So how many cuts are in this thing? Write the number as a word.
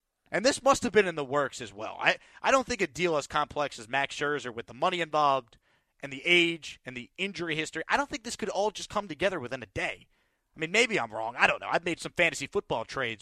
zero